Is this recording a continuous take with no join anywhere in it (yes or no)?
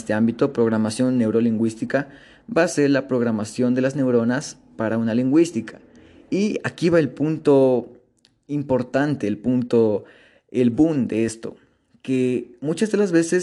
yes